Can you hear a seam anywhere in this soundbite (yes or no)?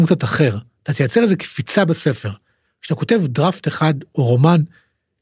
no